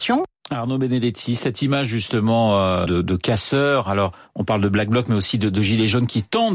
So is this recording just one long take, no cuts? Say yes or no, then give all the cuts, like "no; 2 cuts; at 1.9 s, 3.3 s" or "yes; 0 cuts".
no; 1 cut; at 2.9 s